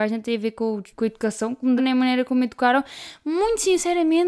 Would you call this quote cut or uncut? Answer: cut